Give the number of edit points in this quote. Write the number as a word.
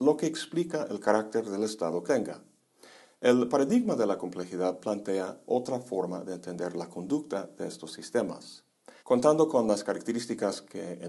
two